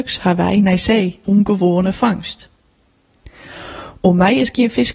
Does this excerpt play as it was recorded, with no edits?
no; 1 cut; at 1.2 s

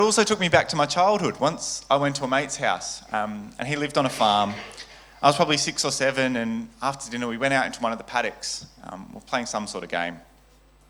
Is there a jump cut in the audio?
no; 0 cuts

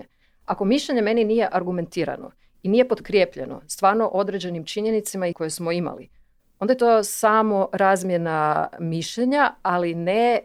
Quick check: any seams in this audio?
yes; 1 cut; at 5.3 s

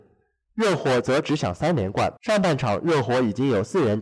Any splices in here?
yes; 1 cut; at 2.2 s

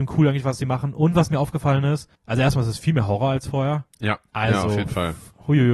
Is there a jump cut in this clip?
yes; 2 cuts; at 2.2 s, 3.9 s

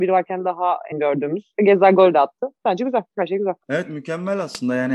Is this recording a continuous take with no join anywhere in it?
no; 3 cuts; at 0.9 s, 3.1 s, 3.6 s

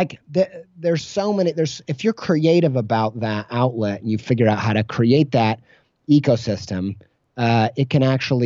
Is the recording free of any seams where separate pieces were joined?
yes; 0 cuts

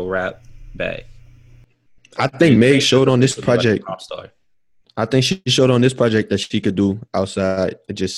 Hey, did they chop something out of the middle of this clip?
no; 0 cuts

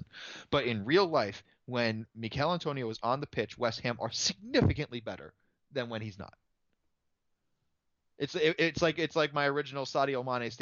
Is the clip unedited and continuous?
yes; 0 cuts

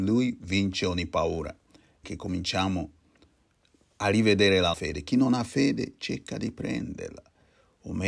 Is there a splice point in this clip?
yes; 2 cuts; at 2.0 s, 4.7 s

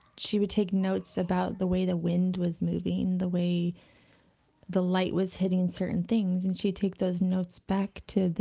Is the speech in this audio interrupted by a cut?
no; 0 cuts

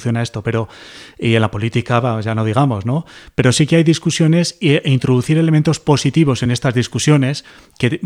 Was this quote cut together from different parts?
no; 0 cuts

